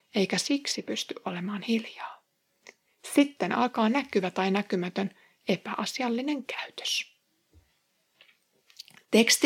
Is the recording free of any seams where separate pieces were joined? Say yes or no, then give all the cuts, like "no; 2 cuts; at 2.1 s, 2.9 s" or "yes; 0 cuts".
yes; 0 cuts